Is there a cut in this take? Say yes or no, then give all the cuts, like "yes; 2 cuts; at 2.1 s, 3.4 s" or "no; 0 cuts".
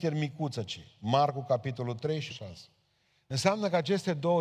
yes; 1 cut; at 2.3 s